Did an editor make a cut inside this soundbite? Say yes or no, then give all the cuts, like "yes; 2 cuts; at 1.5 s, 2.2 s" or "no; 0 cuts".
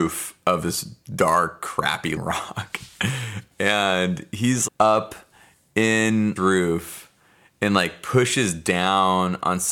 yes; 3 cuts; at 2.2 s, 4.7 s, 6.4 s